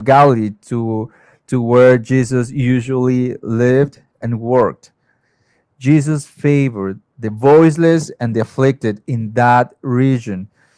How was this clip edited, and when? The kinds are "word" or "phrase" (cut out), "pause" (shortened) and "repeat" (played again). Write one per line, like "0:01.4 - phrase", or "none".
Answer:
none